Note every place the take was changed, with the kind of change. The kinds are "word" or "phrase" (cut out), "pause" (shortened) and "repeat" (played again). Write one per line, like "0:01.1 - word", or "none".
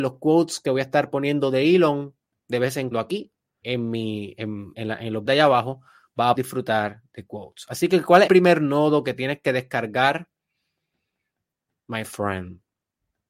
0:02.9 - word
0:03.6 - word
0:04.7 - word
0:05.3 - word
0:06.4 - word
0:08.3 - word